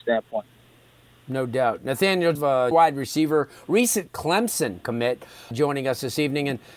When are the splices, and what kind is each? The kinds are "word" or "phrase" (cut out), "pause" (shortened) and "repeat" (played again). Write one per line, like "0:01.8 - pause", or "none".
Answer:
0:02.4 - word
0:02.7 - word
0:05.5 - word